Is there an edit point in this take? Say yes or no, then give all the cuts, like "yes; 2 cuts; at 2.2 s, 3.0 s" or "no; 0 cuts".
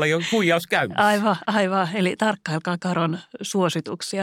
no; 0 cuts